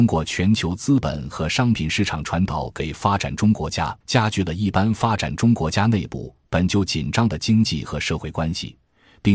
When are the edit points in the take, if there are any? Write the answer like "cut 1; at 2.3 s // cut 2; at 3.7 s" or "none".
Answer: cut 1; at 4.0 s